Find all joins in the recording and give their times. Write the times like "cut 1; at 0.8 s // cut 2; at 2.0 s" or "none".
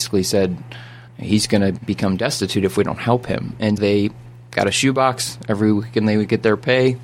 cut 1; at 1.1 s // cut 2; at 1.8 s // cut 3; at 3.8 s

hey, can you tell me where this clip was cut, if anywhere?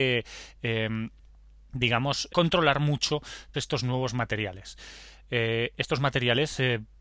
cut 1; at 2.3 s // cut 2; at 3.5 s // cut 3; at 6.0 s

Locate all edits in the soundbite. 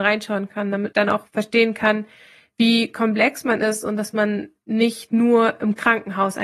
cut 1; at 0.9 s

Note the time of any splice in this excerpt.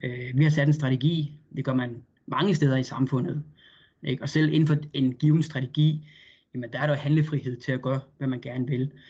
none

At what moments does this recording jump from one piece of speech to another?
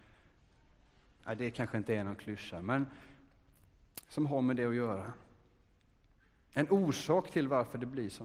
none

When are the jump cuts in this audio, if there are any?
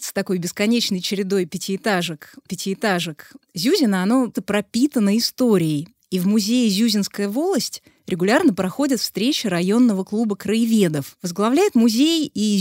cut 1; at 2.5 s // cut 2; at 4.3 s

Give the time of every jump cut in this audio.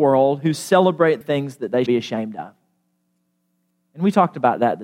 cut 1; at 1.2 s // cut 2; at 1.9 s

